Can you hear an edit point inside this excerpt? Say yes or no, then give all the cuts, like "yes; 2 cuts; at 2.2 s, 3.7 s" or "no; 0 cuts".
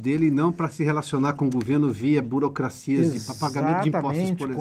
no; 0 cuts